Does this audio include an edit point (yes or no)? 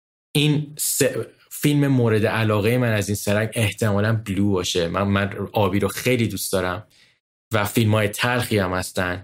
no